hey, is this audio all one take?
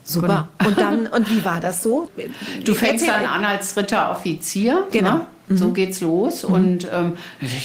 yes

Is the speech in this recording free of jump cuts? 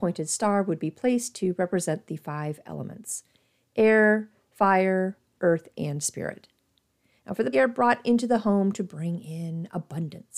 no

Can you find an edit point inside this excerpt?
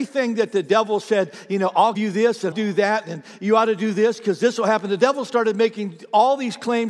yes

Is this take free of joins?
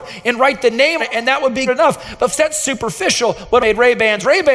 no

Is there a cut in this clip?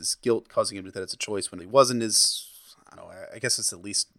yes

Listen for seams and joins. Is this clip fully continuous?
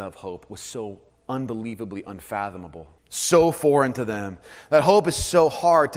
no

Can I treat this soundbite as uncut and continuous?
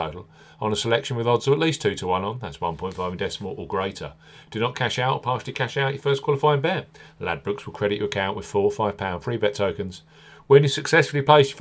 yes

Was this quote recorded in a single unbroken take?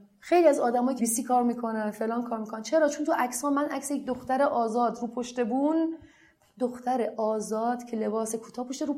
no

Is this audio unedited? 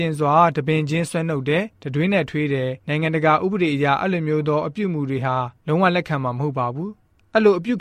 no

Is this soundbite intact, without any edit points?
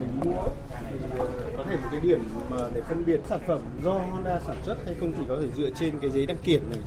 yes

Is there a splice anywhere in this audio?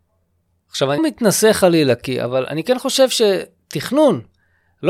yes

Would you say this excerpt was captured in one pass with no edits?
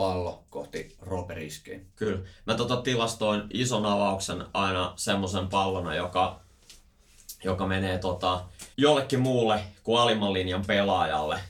no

